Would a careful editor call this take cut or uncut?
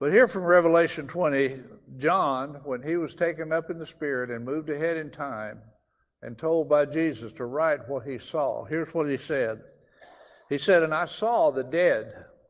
uncut